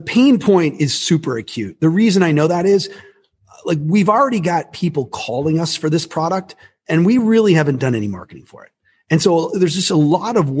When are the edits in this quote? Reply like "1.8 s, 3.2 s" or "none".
none

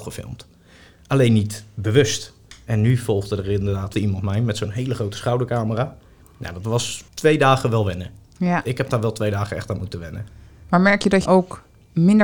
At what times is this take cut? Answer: 3.9 s, 7.1 s, 11.3 s

